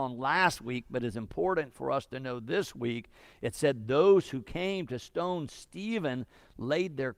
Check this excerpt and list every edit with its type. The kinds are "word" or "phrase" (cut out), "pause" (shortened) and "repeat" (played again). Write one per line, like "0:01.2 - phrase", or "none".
none